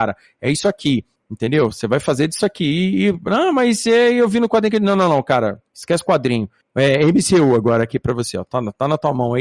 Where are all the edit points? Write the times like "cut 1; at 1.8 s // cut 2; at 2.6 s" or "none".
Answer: none